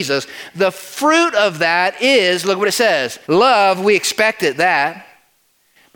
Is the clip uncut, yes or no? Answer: no